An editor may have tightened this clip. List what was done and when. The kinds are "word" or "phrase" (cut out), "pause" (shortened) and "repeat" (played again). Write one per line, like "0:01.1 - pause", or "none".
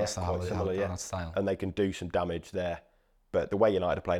none